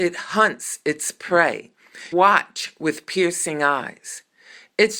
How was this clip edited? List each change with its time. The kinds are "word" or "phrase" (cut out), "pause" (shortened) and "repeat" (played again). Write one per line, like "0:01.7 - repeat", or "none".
0:02.1 - word